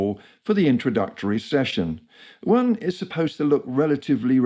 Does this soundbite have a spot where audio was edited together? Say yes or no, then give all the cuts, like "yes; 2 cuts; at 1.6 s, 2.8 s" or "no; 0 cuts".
no; 0 cuts